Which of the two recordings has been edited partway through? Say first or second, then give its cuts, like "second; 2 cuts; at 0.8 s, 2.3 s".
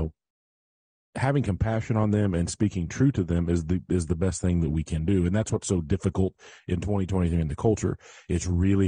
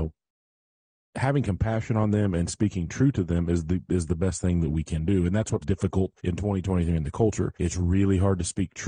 second; 3 cuts; at 5.6 s, 6.2 s, 7.6 s